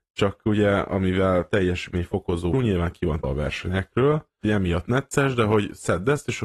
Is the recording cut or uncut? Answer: cut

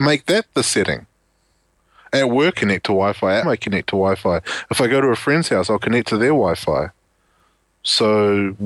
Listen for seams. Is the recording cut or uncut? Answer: cut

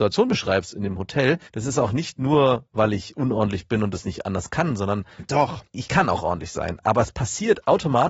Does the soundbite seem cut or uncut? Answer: cut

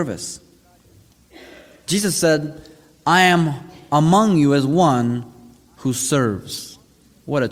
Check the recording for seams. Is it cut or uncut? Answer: uncut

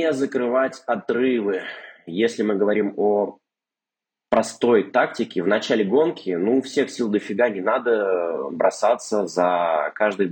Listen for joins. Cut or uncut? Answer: uncut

